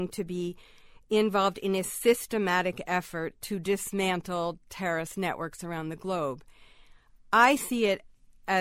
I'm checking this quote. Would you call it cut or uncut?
uncut